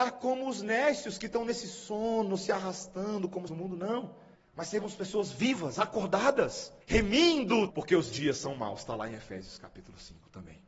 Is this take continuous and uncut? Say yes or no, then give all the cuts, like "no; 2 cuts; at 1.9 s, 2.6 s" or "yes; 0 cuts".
no; 4 cuts; at 3.5 s, 4.3 s, 6.8 s, 7.7 s